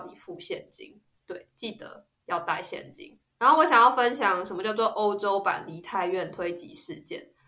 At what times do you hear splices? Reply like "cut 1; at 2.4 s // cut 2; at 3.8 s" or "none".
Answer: cut 1; at 1.1 s